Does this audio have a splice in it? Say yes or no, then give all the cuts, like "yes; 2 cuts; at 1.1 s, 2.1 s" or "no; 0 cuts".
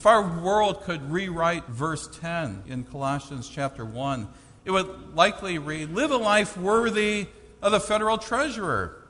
no; 0 cuts